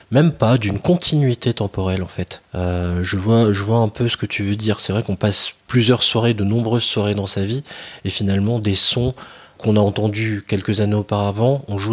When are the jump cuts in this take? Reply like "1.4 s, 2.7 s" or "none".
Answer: 5.6 s, 9.6 s